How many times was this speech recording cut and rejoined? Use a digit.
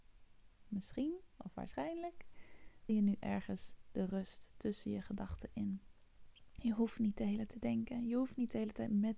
3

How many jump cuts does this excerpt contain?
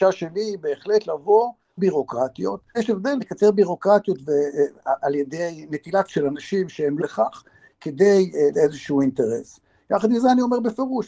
6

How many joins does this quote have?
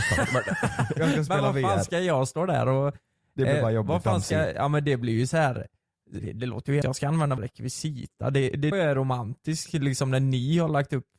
4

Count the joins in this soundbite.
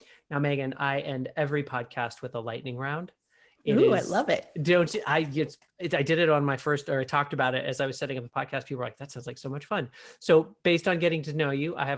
0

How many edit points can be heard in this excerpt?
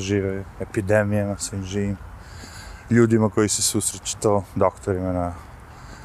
0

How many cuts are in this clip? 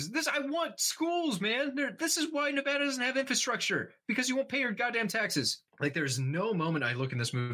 1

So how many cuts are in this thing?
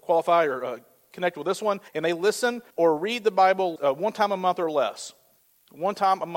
3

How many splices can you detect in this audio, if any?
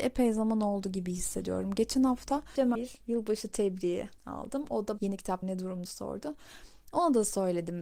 5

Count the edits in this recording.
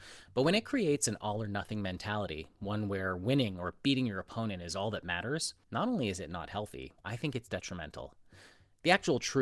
2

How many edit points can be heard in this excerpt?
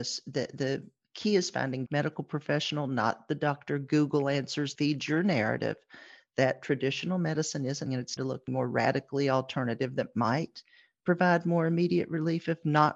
5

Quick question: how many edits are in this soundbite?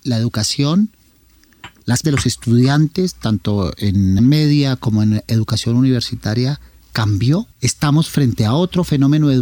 3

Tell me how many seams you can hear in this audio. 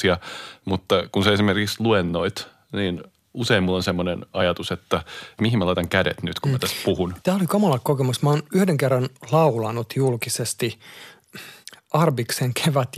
1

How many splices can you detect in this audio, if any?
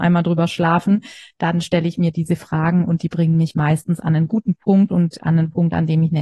0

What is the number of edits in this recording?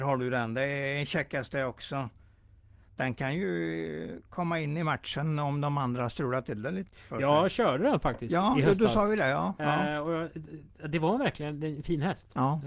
1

